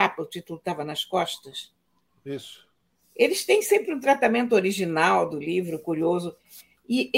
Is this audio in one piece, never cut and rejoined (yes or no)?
yes